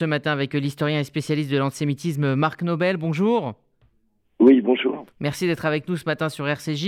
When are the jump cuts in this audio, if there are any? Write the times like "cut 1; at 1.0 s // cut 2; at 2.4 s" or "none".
none